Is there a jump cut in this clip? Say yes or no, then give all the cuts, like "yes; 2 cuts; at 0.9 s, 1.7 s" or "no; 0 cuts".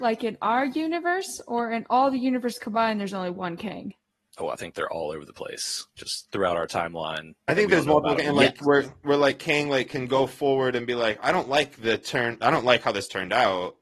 yes; 1 cut; at 7.4 s